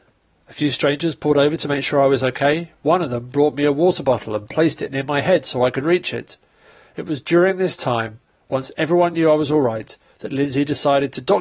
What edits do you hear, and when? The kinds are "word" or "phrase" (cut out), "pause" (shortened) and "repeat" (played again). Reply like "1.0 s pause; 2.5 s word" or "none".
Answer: none